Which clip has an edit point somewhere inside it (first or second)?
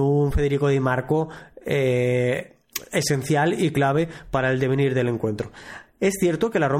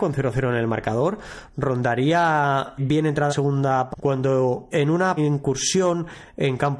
second